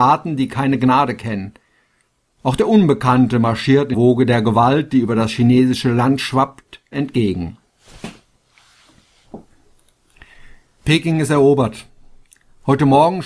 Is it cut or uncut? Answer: cut